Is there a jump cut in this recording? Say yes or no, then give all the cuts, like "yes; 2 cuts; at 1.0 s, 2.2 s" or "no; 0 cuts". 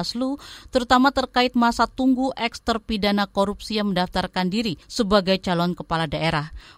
yes; 1 cut; at 4.8 s